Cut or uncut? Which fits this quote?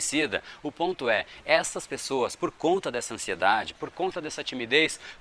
uncut